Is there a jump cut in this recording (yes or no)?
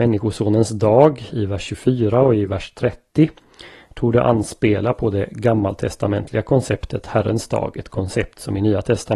no